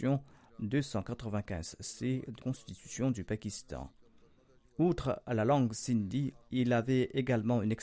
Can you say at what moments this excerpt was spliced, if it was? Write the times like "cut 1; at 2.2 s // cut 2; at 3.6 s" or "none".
cut 1; at 2.4 s // cut 2; at 6.4 s